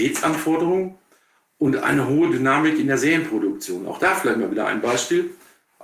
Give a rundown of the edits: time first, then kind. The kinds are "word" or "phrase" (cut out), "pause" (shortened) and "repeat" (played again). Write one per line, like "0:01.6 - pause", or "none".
none